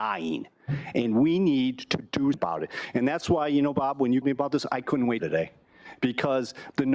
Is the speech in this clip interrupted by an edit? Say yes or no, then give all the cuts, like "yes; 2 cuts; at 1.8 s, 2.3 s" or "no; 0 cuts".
yes; 3 cuts; at 2.3 s, 4.2 s, 5.2 s